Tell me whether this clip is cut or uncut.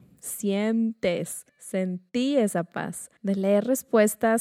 cut